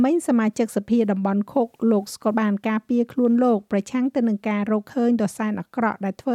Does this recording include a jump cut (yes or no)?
yes